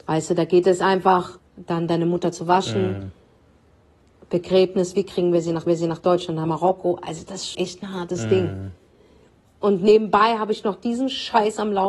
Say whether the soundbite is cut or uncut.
cut